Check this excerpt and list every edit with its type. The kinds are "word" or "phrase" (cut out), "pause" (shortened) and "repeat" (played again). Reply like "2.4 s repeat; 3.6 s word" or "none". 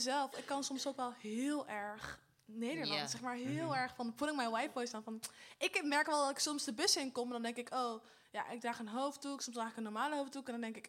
none